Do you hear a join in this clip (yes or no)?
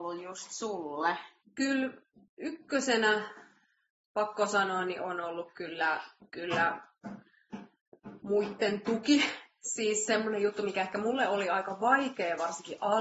no